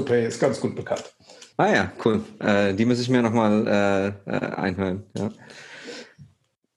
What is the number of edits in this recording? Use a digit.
1